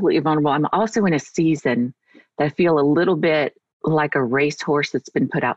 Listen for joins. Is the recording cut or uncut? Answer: uncut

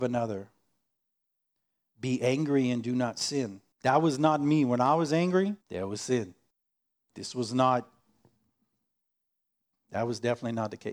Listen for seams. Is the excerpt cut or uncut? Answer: cut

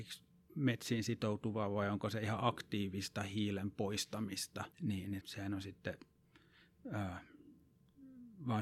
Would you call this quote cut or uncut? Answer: cut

